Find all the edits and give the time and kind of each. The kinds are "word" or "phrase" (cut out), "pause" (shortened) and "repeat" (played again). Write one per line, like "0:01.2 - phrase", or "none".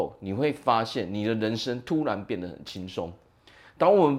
none

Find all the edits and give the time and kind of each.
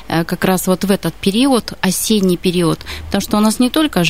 none

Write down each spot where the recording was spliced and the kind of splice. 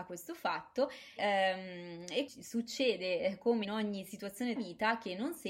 0:01.2 - word
0:02.3 - word
0:03.6 - word
0:04.6 - word

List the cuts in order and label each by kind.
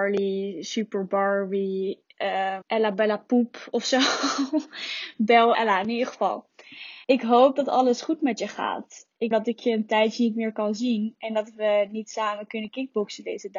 0:02.6 - phrase
0:05.5 - word
0:07.0 - pause
0:09.3 - phrase

